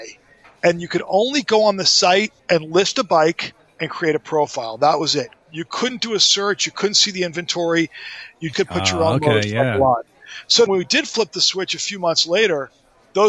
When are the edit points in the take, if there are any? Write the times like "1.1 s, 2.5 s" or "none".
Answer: 2.4 s, 8.5 s, 10.7 s